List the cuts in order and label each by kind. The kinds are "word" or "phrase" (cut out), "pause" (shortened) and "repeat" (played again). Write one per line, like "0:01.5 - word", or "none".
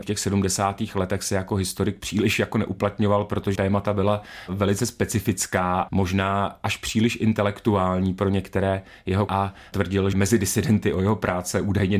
0:03.5 - word
0:05.9 - word
0:09.3 - word
0:10.1 - word